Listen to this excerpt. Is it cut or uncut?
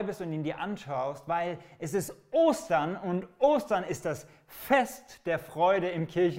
uncut